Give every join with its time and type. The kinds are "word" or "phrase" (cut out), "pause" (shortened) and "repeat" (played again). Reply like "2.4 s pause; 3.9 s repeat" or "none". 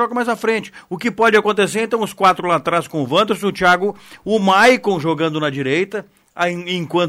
none